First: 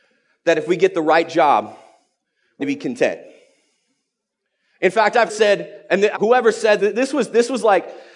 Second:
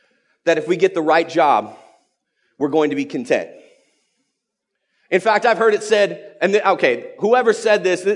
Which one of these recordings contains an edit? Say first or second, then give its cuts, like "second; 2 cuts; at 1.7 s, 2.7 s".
first; 4 cuts; at 2.6 s, 5.3 s, 6.1 s, 6.8 s